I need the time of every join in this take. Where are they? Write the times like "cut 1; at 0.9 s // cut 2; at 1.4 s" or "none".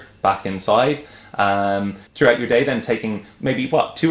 cut 1; at 2.1 s